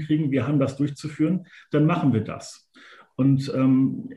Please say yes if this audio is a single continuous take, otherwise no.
yes